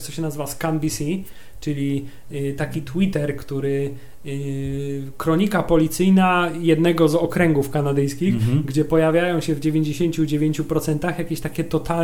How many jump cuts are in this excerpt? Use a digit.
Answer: 0